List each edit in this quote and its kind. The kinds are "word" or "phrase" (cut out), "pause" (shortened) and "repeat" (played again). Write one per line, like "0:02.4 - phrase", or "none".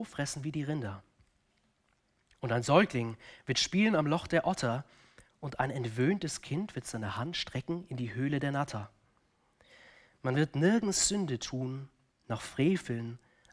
none